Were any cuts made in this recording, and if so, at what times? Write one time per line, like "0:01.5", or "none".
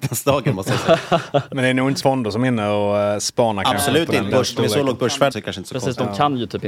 0:02.0
0:04.3
0:05.3

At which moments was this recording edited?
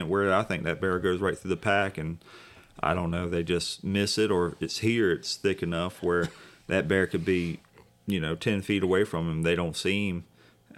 none

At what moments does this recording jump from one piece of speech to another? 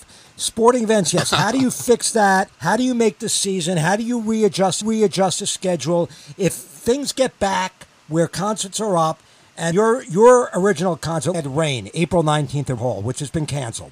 0:02.5
0:04.8
0:09.7
0:11.3
0:12.8

